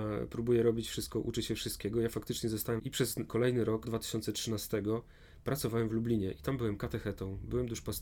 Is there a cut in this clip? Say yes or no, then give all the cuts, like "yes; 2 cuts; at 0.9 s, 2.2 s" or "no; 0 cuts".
yes; 3 cuts; at 2.8 s, 3.3 s, 3.8 s